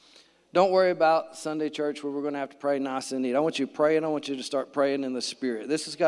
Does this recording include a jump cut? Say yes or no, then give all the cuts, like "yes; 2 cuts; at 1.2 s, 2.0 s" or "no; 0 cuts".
no; 0 cuts